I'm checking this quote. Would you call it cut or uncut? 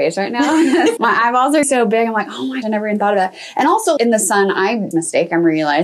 cut